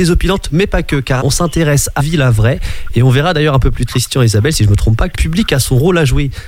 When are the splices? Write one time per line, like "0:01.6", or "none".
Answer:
0:01.2
0:02.0
0:03.9
0:05.1